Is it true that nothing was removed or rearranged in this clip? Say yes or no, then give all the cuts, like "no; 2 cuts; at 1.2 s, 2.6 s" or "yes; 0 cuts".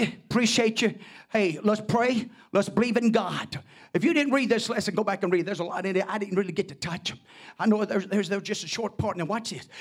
yes; 0 cuts